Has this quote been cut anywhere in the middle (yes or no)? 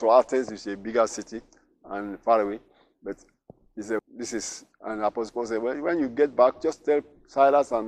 yes